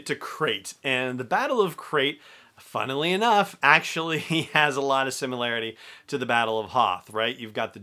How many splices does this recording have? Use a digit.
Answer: 0